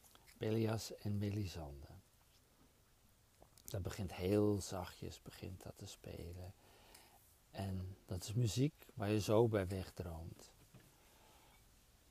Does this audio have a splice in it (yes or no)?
no